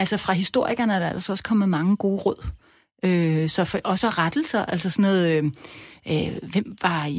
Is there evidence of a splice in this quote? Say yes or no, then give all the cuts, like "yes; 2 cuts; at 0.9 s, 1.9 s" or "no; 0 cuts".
no; 0 cuts